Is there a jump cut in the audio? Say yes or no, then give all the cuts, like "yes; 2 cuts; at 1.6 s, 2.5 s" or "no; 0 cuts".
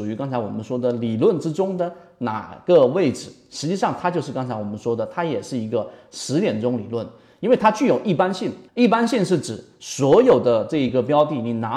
yes; 1 cut; at 8.7 s